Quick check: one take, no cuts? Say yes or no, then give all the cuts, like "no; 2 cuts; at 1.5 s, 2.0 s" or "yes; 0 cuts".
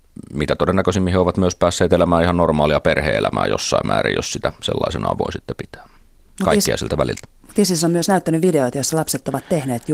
yes; 0 cuts